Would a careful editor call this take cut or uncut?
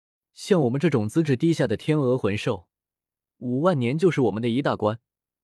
uncut